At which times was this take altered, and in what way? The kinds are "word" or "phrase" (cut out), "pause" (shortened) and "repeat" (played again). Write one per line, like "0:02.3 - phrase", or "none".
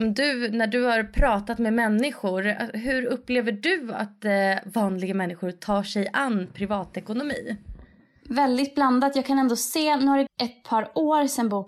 0:10.3 - word